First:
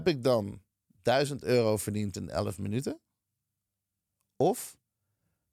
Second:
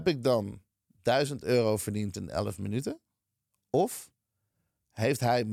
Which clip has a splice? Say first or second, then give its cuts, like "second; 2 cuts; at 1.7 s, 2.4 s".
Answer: second; 1 cut; at 3.5 s